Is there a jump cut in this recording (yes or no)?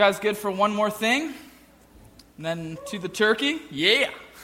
no